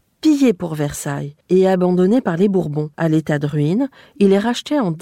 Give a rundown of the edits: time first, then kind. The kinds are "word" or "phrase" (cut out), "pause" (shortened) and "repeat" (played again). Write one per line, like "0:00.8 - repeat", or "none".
0:01.4 - pause
0:02.9 - pause